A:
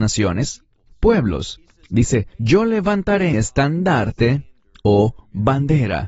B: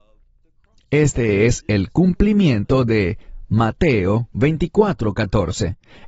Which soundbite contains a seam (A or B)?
A